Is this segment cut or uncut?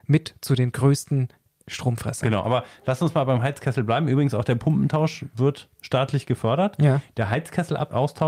uncut